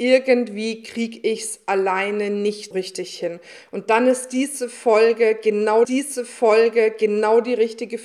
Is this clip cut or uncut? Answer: cut